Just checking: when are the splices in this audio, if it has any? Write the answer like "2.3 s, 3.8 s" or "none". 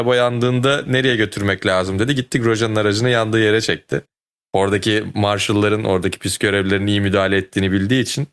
none